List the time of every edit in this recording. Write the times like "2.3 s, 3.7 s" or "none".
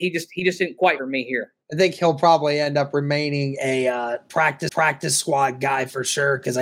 1.0 s, 1.6 s, 4.7 s